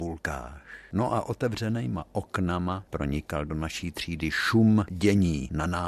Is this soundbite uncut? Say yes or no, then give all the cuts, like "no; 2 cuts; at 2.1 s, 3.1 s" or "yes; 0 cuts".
no; 1 cut; at 2.9 s